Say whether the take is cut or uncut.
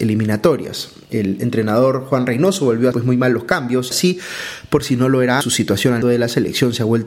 cut